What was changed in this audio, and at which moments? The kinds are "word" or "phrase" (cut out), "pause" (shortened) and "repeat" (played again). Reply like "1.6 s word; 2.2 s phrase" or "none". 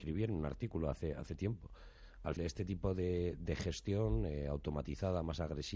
2.4 s word